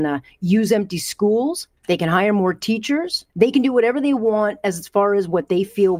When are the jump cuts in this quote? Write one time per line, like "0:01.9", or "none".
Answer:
0:01.8
0:03.3

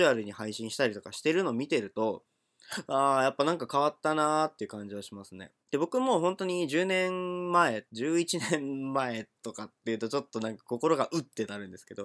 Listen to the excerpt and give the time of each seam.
0:05.6
0:07.9

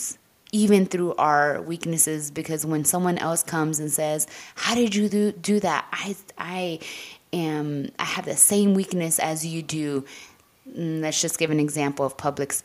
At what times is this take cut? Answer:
none

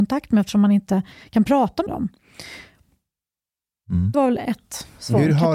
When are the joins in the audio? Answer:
0:01.9
0:04.1

